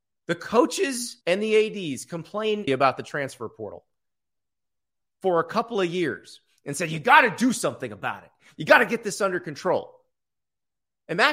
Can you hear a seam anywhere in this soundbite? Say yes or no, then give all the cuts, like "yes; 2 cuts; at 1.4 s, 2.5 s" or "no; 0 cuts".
yes; 2 cuts; at 1.2 s, 2.7 s